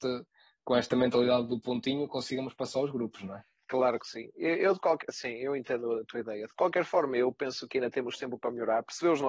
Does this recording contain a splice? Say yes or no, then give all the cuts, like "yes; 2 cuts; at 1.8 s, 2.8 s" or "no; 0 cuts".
no; 0 cuts